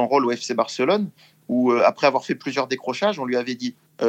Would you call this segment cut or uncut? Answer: uncut